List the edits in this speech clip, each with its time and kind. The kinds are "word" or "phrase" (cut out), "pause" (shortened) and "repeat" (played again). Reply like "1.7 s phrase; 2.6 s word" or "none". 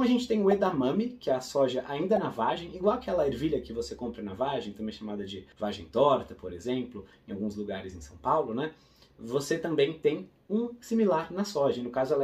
none

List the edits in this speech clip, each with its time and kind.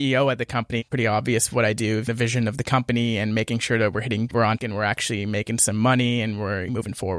2.1 s phrase; 4.3 s phrase; 4.6 s word

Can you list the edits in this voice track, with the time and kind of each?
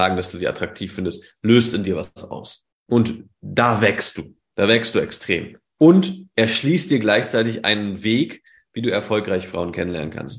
2.7 s pause

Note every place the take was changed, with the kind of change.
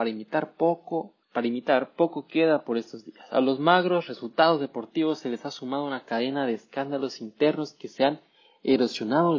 1.2 s pause

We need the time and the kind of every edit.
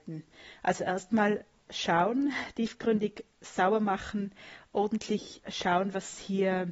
none

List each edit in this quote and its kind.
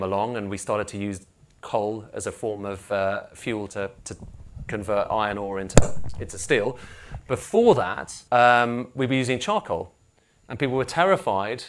3.7 s word; 8.3 s pause

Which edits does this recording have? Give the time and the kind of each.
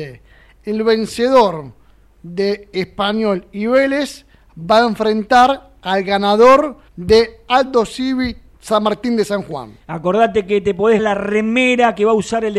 6.9 s pause; 11.0 s word

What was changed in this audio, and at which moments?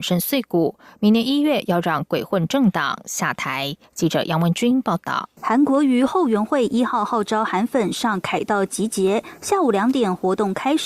5.4 s pause

